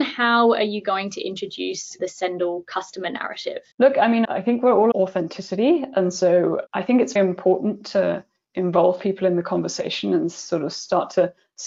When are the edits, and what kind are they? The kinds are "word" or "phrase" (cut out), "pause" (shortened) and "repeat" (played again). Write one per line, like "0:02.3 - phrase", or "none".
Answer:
0:02.0 - phrase
0:03.7 - pause
0:04.2 - word
0:04.9 - word
0:06.7 - word
0:07.2 - word